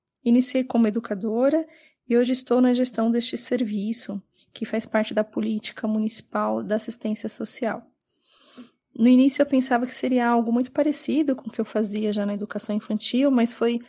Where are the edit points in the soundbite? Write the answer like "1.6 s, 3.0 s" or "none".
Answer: none

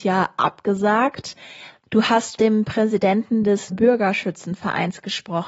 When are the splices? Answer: 2.4 s, 3.7 s

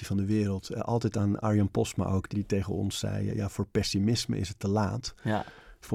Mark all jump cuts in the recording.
2.3 s, 3.3 s

